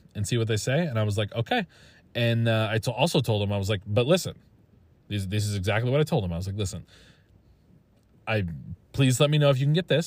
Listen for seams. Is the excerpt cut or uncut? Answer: uncut